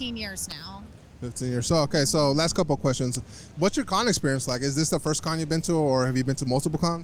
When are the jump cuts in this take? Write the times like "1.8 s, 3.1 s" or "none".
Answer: none